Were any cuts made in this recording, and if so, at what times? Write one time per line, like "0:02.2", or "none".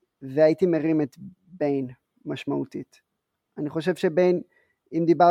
none